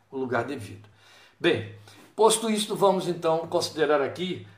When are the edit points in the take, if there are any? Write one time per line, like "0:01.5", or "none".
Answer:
none